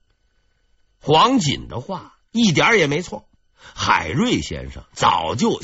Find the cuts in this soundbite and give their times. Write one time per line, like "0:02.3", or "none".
0:03.4

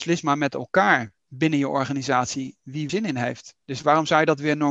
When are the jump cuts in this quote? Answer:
0:01.2
0:02.9
0:03.6

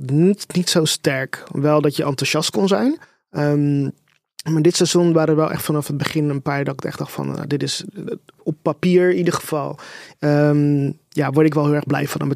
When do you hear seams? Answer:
0:03.0

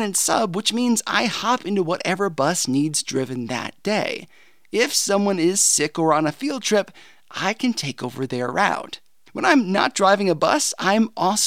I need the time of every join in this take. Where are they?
none

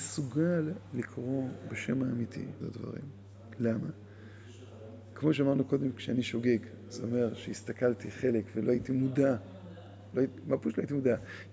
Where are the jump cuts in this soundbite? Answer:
0:02.6

